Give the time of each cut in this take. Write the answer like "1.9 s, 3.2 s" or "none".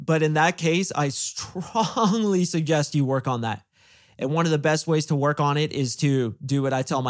none